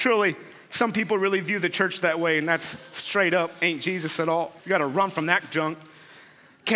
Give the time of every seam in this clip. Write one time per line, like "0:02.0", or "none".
0:04.6